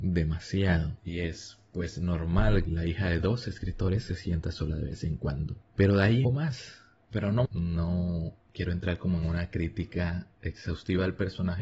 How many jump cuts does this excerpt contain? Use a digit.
4